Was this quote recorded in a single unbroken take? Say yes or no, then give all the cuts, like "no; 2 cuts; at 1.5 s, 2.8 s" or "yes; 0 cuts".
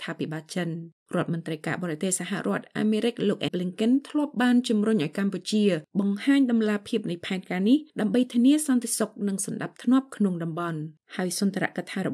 no; 1 cut; at 3.5 s